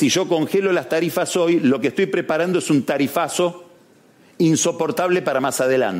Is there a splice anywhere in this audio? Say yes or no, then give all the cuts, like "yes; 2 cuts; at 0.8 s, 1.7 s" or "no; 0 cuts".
no; 0 cuts